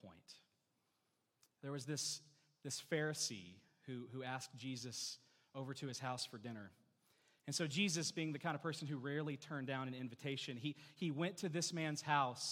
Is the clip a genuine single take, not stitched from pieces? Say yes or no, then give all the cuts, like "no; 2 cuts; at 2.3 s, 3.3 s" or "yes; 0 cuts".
yes; 0 cuts